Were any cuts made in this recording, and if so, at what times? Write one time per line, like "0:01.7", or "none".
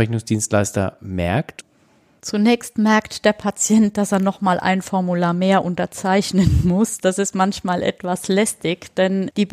none